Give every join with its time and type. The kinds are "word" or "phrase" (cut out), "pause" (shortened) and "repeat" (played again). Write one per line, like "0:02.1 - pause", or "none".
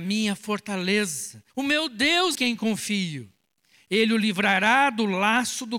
0:01.5 - pause
0:02.3 - word